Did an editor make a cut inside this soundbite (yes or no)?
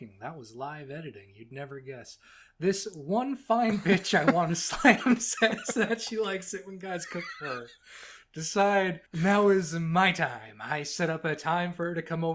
yes